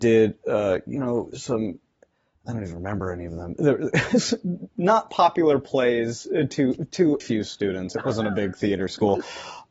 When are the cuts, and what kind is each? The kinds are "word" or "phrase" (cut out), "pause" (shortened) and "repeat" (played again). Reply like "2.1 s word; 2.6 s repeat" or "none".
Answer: 7.2 s word